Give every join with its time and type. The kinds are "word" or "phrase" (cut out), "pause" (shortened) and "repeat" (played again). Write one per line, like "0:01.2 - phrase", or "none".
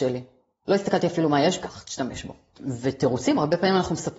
0:01.6 - phrase